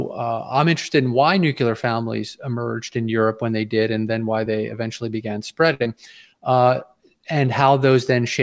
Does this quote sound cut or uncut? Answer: uncut